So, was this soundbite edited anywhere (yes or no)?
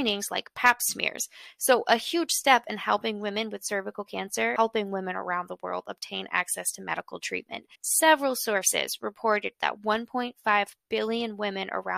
yes